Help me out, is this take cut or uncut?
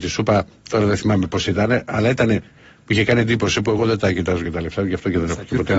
uncut